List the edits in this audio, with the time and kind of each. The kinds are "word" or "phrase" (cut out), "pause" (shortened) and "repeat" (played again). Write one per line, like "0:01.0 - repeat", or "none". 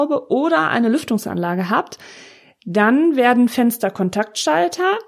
none